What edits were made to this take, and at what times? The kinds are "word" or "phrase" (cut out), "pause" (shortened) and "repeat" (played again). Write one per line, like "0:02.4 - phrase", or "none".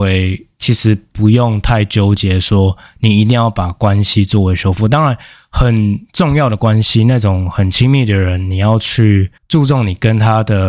0:09.4 - pause